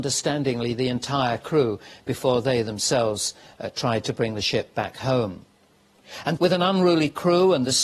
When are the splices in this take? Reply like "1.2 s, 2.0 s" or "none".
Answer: 6.4 s